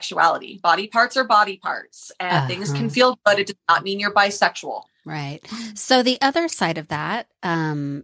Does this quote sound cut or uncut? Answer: uncut